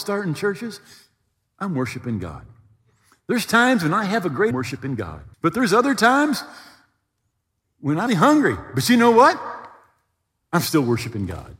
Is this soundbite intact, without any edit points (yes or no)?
no